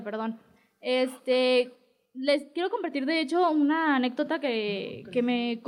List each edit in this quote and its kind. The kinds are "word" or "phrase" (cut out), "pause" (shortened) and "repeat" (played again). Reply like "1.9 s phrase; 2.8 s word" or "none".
none